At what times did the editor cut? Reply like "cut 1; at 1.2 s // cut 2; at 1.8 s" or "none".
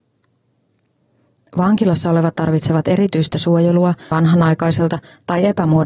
cut 1; at 2.3 s // cut 2; at 4.1 s